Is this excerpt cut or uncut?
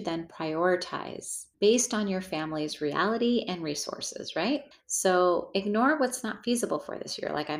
cut